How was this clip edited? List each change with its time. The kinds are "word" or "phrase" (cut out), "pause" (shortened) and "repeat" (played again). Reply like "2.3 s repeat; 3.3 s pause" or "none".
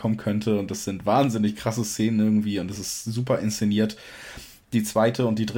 none